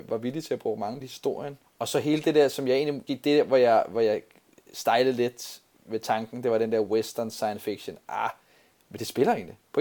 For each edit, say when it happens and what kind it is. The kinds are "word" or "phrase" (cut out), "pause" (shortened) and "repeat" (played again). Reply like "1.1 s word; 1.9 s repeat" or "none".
1.0 s phrase; 3.1 s phrase